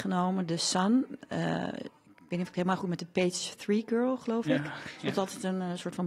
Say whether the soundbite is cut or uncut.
uncut